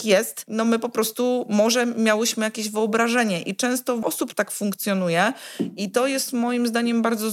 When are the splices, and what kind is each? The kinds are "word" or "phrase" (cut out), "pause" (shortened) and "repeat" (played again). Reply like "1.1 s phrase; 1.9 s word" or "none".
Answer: 4.0 s word